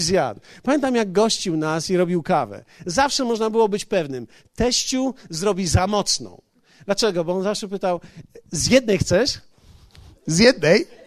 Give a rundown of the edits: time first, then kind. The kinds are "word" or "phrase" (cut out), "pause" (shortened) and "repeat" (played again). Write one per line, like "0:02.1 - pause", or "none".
none

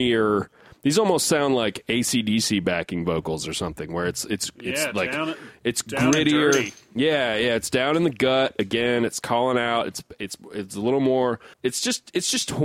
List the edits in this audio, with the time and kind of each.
0:11.5 - pause

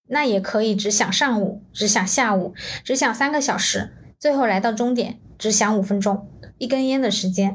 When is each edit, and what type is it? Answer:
none

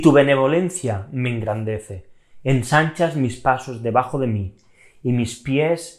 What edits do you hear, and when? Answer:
none

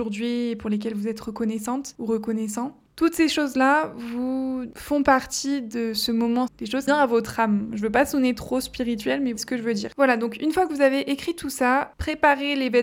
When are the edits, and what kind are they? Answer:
0:06.5 - word
0:06.9 - phrase
0:09.4 - word

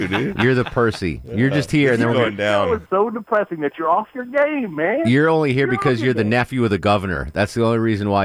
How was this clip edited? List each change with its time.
0:02.8 - word

